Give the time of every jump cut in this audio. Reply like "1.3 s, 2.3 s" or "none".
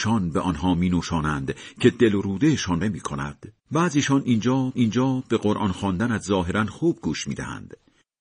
2.8 s, 3.6 s, 4.7 s